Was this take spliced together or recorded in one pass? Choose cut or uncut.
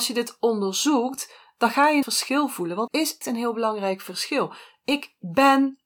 cut